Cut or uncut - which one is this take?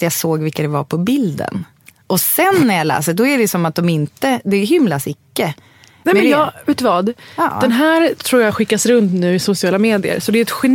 uncut